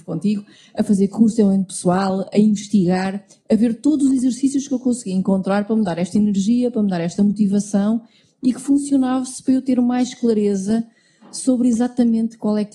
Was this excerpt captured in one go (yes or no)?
yes